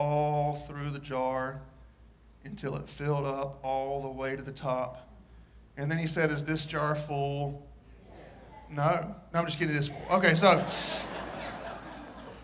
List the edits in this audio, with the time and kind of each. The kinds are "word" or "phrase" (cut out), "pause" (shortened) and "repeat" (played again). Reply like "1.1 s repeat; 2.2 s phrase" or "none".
none